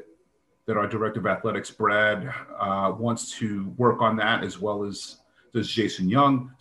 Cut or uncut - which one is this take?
uncut